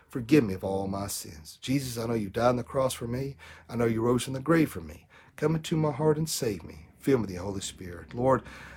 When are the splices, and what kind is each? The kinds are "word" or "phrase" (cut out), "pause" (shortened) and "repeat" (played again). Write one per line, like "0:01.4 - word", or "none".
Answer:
none